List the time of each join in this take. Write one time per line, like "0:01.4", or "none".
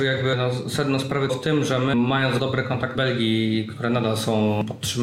0:01.3
0:01.9
0:02.4
0:03.0